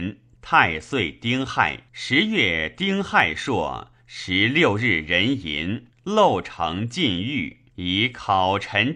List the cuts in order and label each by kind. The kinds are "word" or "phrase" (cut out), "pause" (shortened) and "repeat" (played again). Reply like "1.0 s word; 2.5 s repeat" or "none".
1.9 s pause; 5.9 s pause; 7.7 s pause

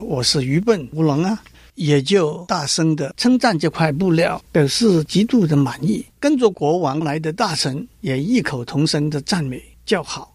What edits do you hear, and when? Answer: 4.5 s pause; 6.1 s pause; 7.9 s pause

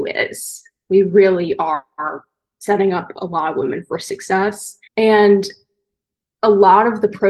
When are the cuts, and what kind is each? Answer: 4.9 s pause

